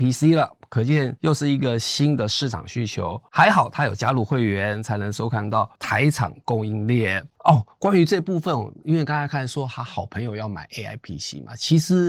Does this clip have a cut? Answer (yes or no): no